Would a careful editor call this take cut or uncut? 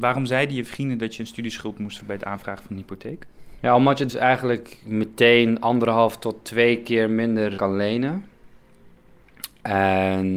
cut